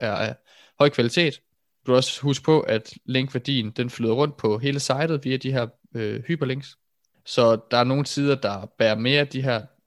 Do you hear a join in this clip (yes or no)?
yes